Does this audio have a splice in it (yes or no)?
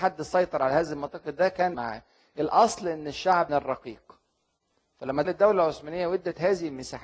yes